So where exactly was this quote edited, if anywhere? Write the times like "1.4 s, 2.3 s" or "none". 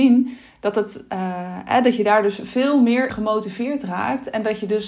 3.1 s